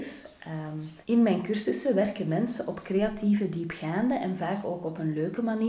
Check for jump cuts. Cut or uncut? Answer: cut